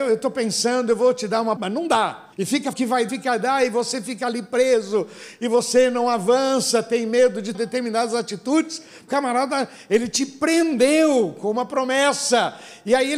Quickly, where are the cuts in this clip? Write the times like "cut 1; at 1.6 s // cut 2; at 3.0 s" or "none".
cut 1; at 1.6 s // cut 2; at 2.3 s // cut 3; at 2.7 s // cut 4; at 3.1 s // cut 5; at 7.5 s // cut 6; at 9.1 s